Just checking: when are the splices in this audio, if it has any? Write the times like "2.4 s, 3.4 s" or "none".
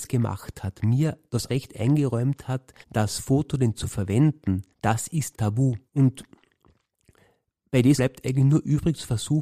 1.5 s, 2.8 s, 3.8 s, 4.7 s, 5.3 s, 5.9 s, 8.0 s